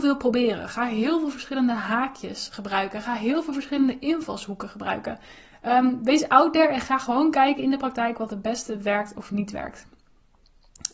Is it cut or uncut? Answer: uncut